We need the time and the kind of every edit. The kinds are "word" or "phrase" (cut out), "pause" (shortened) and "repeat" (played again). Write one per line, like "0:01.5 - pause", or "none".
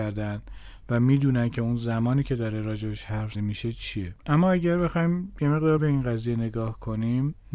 0:03.3 - word
0:04.2 - pause
0:05.8 - word